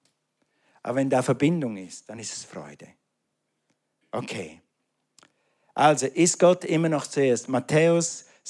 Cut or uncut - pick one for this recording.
uncut